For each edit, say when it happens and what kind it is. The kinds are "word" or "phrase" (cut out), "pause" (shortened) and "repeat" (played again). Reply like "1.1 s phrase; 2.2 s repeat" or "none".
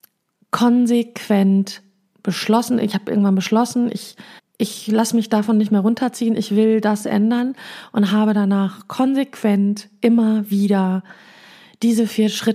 4.4 s pause

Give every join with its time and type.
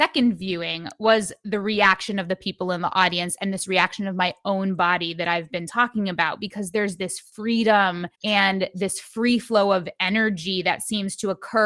8.1 s pause

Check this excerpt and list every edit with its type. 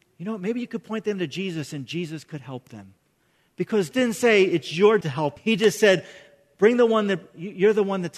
3.9 s word; 5.0 s word; 5.4 s word

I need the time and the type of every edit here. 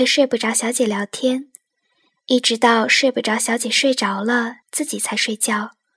4.6 s pause

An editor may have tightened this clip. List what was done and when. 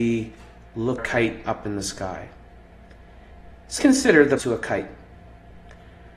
1.0 s phrase; 1.4 s word; 3.8 s word; 4.4 s word

